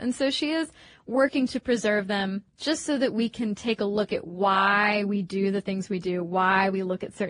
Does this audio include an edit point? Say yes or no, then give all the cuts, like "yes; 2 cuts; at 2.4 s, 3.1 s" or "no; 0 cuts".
yes; 1 cut; at 2.5 s